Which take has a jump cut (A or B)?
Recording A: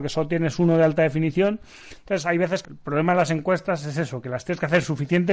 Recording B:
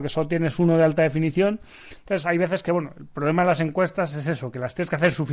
A